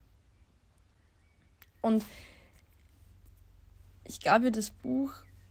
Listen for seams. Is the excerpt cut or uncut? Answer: uncut